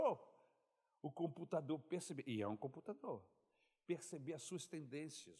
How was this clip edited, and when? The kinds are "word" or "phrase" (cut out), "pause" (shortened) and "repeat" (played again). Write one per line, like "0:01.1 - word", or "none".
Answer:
none